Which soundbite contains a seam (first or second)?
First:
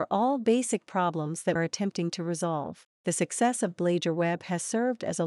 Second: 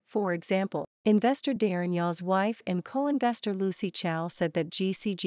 first